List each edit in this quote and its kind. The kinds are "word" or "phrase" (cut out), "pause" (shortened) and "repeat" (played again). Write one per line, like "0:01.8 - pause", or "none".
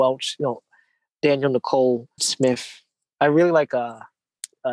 0:02.2 - phrase